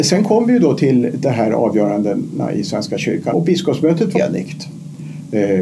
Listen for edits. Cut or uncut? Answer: cut